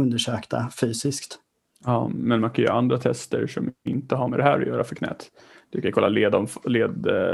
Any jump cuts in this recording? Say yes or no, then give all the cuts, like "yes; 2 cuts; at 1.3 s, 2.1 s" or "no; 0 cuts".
no; 0 cuts